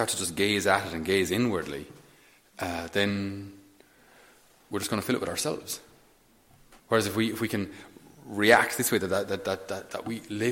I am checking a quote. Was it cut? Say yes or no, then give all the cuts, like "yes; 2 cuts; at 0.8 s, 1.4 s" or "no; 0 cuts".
yes; 1 cut; at 6.8 s